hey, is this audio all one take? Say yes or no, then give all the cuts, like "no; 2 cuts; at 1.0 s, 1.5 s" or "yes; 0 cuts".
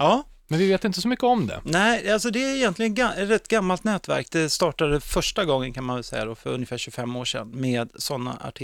yes; 0 cuts